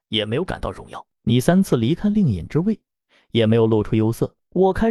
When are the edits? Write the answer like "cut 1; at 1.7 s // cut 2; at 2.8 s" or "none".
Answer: none